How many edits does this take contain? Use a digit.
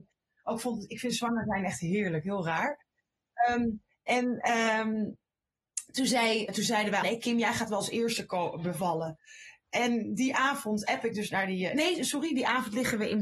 2